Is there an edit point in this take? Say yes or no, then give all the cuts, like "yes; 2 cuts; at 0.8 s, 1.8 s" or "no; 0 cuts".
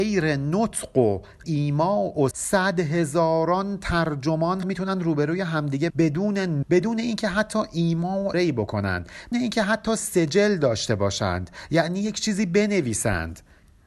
yes; 7 cuts; at 1.4 s, 2.3 s, 4.6 s, 5.9 s, 6.6 s, 8.3 s, 9.3 s